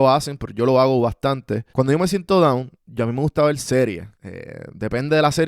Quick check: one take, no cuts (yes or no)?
no